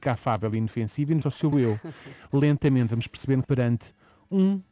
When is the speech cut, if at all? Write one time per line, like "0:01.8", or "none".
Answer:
0:01.2
0:01.5
0:03.4